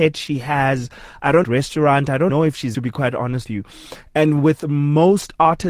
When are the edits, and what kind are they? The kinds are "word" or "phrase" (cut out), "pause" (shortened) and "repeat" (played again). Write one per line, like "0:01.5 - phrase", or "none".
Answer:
0:01.4 - phrase
0:02.3 - word
0:02.7 - phrase
0:03.5 - word